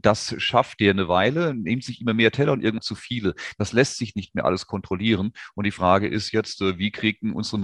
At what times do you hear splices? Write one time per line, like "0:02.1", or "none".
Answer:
0:02.8